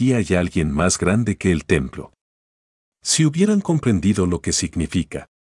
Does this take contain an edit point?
no; 0 cuts

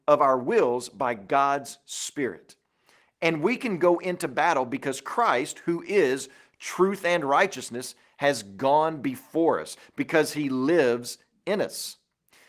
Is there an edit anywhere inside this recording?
no; 0 cuts

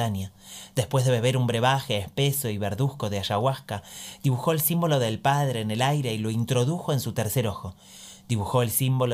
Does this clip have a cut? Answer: no; 0 cuts

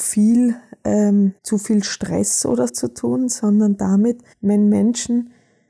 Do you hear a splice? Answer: yes; 3 cuts; at 1.4 s, 2.7 s, 4.3 s

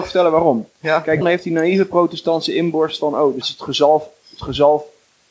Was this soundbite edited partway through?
yes; 2 cuts; at 1.2 s, 3.4 s

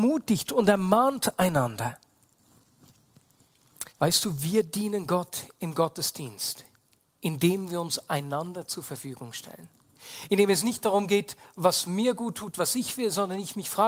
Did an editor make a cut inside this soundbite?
yes; 1 cut; at 3.9 s

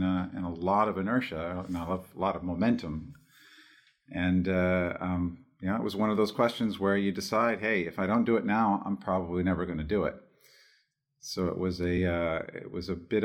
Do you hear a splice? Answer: no; 0 cuts

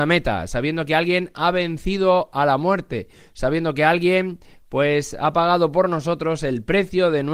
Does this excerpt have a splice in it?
no; 0 cuts

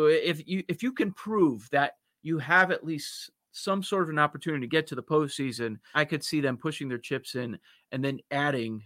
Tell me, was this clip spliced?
yes; 1 cut; at 5.9 s

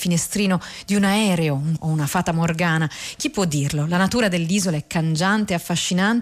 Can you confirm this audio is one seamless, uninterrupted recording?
no; 1 cut; at 1.8 s

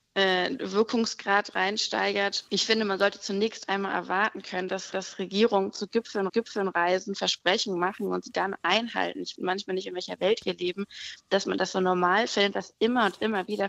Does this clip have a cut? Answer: yes; 4 cuts; at 2.5 s, 4.9 s, 6.3 s, 9.4 s

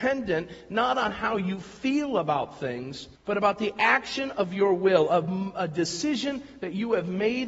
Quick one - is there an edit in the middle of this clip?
yes; 1 cut; at 3.2 s

